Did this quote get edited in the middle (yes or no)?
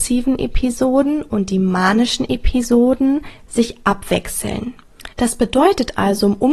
yes